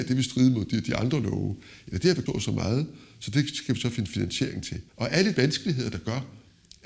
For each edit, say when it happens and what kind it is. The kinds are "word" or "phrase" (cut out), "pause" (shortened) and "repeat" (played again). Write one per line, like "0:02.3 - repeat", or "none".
0:02.3 - phrase
0:04.9 - pause
0:05.4 - word